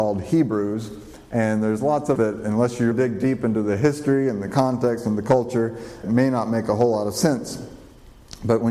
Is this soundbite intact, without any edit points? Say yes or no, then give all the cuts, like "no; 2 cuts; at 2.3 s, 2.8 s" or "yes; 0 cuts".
no; 3 cuts; at 2.2 s, 2.9 s, 6.0 s